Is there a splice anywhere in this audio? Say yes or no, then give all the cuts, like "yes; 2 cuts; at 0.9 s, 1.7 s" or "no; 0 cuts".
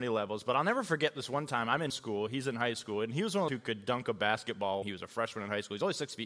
yes; 3 cuts; at 1.9 s, 3.5 s, 4.8 s